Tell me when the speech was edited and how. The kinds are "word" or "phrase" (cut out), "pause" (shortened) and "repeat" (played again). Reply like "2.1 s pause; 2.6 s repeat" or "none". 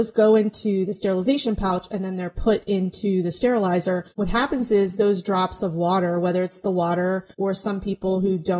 4.1 s pause; 7.3 s pause